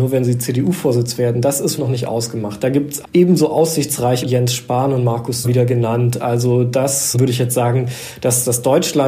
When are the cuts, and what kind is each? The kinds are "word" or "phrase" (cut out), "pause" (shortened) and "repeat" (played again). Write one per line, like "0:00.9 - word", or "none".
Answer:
0:01.8 - word
0:03.0 - word
0:04.2 - word
0:05.4 - phrase
0:07.1 - word